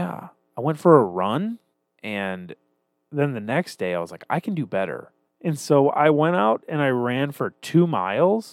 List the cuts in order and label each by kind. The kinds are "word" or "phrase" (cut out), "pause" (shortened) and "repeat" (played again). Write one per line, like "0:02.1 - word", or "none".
0:01.7 - pause
0:05.3 - pause